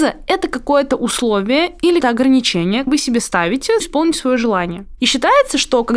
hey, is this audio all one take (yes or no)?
no